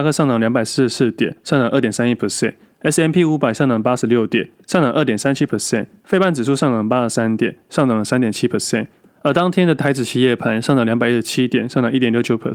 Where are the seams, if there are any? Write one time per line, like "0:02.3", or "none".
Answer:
none